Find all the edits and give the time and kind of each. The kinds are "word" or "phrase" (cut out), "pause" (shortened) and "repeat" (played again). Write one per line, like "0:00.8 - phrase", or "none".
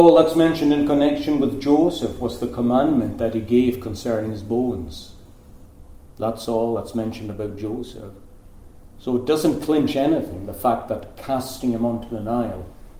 none